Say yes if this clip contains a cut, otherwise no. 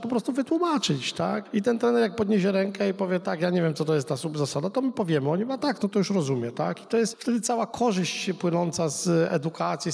no